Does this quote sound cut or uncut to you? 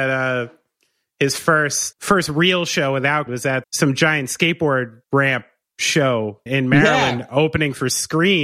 cut